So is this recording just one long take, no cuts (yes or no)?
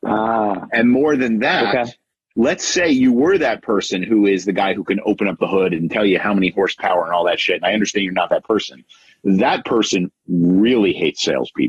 yes